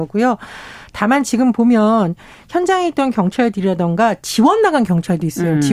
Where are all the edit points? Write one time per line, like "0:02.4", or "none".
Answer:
none